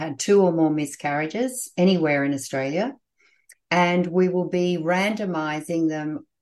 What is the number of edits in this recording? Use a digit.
0